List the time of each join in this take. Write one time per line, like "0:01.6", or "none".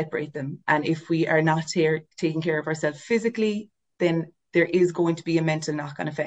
none